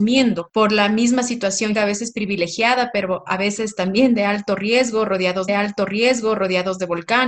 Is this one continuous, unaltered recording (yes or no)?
no